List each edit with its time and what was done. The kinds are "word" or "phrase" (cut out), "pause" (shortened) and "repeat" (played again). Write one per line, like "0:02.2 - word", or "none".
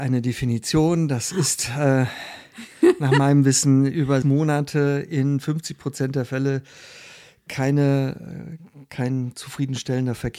0:04.2 - word

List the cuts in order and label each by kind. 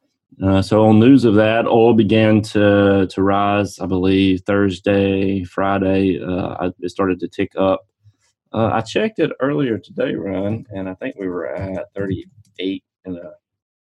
none

